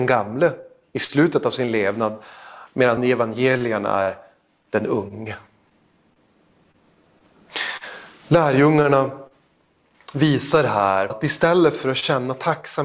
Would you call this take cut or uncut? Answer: cut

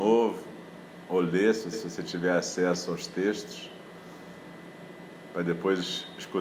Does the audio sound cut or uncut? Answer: cut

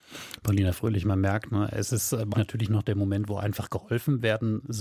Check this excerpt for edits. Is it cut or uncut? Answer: cut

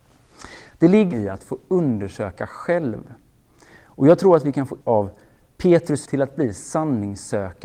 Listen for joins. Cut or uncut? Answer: cut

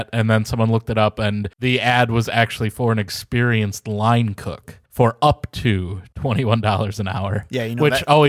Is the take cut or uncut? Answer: cut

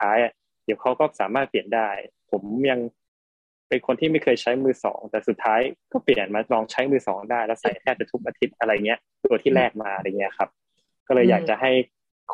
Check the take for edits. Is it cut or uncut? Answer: uncut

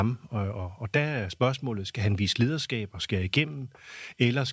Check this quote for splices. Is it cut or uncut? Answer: uncut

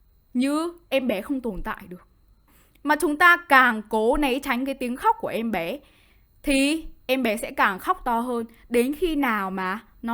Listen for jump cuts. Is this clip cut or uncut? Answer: uncut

